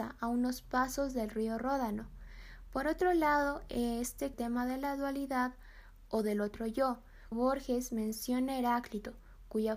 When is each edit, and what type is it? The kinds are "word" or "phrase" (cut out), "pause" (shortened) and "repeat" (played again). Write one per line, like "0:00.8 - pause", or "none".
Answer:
0:04.3 - phrase
0:07.3 - word